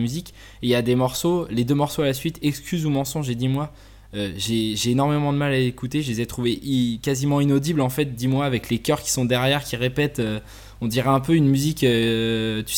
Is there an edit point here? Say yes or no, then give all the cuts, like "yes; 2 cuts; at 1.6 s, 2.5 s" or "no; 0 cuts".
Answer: no; 0 cuts